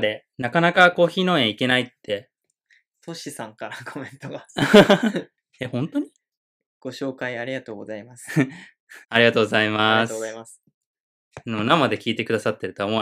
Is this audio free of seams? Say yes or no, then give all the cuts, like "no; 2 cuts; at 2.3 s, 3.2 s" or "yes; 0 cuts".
no; 1 cut; at 9.0 s